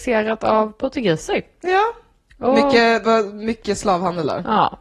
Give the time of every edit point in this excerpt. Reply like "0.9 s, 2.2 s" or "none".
none